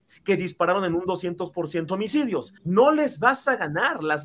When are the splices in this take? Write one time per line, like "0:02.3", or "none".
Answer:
0:01.9
0:02.6